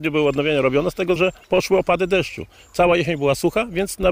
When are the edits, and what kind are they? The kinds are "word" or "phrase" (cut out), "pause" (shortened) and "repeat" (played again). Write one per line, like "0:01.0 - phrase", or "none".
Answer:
0:01.2 - word